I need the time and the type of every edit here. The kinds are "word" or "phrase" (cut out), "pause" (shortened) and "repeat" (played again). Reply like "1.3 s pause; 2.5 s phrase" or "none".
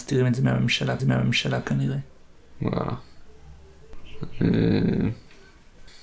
1.0 s repeat